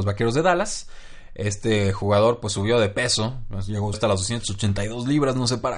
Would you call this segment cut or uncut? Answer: cut